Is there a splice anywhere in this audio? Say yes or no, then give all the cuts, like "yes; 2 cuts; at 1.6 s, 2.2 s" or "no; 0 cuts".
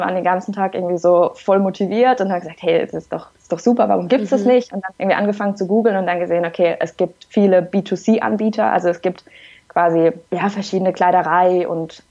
yes; 2 cuts; at 5.0 s, 10.3 s